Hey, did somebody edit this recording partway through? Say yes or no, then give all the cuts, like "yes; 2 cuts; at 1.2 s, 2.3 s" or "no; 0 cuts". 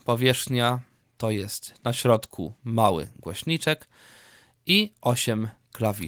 no; 0 cuts